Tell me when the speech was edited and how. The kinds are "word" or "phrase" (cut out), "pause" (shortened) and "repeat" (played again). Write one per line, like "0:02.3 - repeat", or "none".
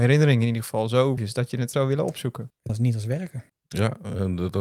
0:01.2 - word
0:01.7 - word
0:02.7 - word